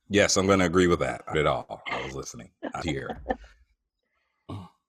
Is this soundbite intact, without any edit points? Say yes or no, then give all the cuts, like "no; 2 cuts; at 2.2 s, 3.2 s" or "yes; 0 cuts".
no; 3 cuts; at 1.0 s, 1.3 s, 2.8 s